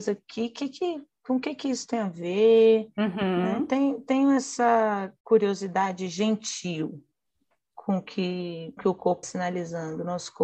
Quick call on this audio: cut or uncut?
cut